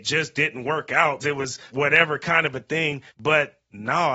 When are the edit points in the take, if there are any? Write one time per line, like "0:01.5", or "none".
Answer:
0:01.2
0:01.7
0:03.1